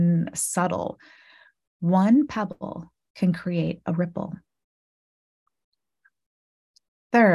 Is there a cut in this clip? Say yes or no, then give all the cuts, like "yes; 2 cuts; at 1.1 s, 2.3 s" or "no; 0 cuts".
no; 0 cuts